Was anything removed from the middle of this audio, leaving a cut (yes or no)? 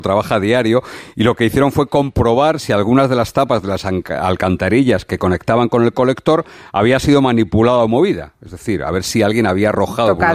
no